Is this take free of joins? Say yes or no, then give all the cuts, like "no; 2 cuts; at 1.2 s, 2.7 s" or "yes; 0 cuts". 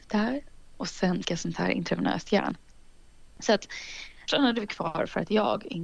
no; 2 cuts; at 1.2 s, 4.3 s